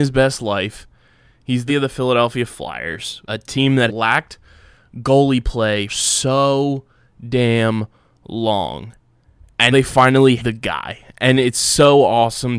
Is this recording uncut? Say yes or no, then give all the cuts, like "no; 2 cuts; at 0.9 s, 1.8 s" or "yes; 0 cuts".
no; 6 cuts; at 1.7 s, 3.3 s, 3.9 s, 5.9 s, 9.7 s, 10.4 s